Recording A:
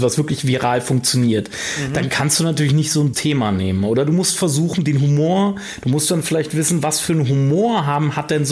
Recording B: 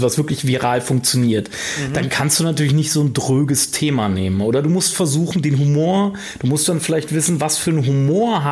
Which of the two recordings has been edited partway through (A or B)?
A